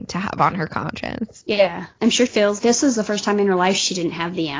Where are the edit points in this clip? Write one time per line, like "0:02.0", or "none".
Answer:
0:02.3
0:02.6